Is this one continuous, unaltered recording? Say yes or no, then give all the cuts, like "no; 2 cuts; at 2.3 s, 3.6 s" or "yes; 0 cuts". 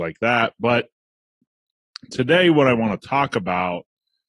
yes; 0 cuts